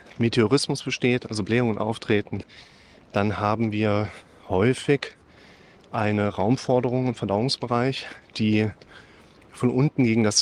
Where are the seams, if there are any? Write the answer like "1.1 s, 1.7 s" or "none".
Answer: none